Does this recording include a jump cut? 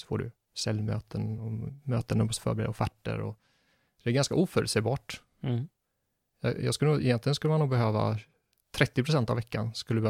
no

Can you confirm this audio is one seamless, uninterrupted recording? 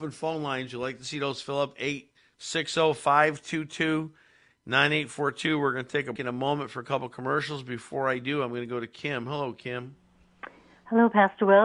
no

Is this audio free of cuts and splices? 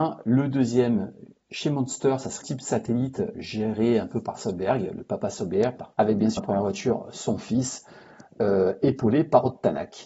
no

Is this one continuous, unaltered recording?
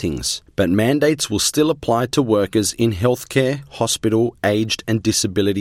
yes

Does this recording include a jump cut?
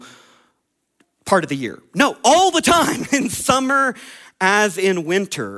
no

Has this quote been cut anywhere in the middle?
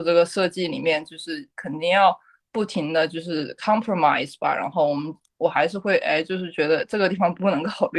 no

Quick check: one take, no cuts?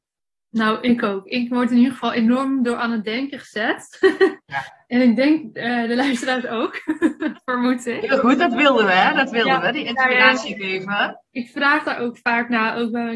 yes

